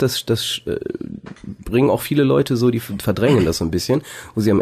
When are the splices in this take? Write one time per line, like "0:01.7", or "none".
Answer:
none